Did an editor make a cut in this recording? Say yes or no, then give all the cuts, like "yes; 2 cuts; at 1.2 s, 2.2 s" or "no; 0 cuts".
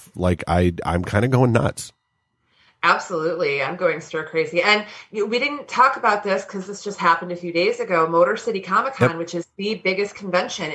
no; 0 cuts